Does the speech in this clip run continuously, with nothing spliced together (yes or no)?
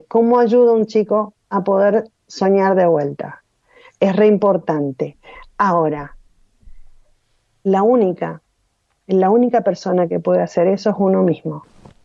yes